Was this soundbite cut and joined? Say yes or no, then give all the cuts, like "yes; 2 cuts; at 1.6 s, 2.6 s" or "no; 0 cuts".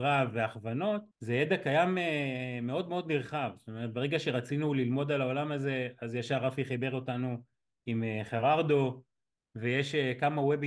yes; 1 cut; at 1.1 s